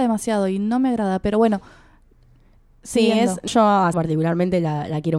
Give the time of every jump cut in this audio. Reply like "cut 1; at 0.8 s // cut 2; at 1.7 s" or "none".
cut 1; at 3.5 s // cut 2; at 3.9 s

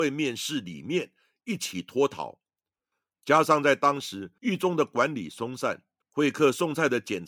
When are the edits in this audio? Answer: none

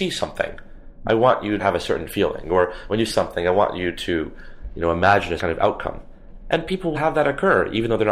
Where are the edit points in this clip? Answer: cut 1; at 1.6 s // cut 2; at 3.1 s // cut 3; at 5.4 s // cut 4; at 6.9 s

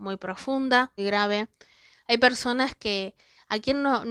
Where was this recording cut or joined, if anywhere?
cut 1; at 1.0 s

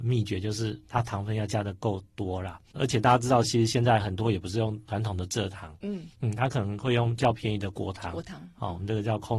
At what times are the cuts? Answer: cut 1; at 6.1 s

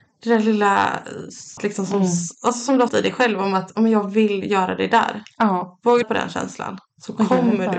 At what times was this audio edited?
cut 1; at 1.6 s // cut 2; at 2.9 s // cut 3; at 6.0 s

